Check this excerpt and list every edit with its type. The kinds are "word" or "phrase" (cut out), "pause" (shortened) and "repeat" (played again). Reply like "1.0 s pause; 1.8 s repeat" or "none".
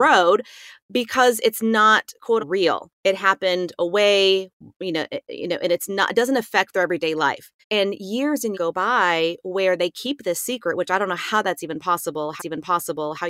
2.4 s word; 2.9 s pause; 7.6 s pause; 8.5 s word; 12.4 s repeat